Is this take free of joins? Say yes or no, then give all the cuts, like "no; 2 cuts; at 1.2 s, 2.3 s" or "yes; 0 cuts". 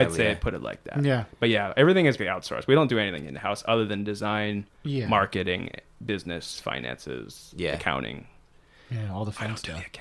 no; 1 cut; at 2.2 s